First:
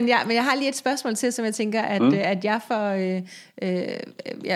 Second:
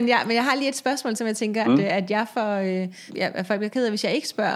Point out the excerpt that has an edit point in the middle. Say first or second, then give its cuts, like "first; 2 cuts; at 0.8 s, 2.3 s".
second; 3 cuts; at 1.2 s, 1.6 s, 3.1 s